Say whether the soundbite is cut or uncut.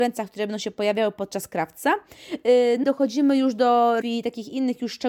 cut